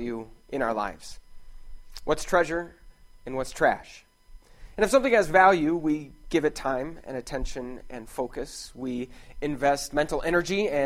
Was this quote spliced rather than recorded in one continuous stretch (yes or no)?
no